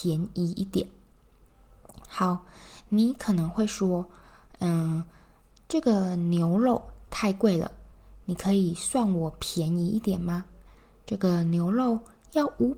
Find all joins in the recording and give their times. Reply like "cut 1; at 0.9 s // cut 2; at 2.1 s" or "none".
none